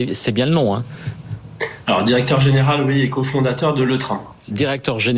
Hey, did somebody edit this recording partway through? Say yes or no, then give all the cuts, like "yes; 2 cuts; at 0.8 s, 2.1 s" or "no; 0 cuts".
no; 0 cuts